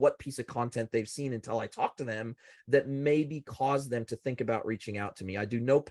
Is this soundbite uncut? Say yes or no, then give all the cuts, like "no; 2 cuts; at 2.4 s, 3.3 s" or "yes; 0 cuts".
yes; 0 cuts